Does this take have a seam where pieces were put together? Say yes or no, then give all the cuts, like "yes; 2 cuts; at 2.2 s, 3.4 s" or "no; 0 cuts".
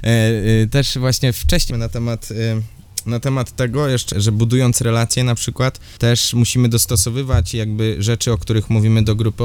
yes; 3 cuts; at 1.7 s, 4.1 s, 6.0 s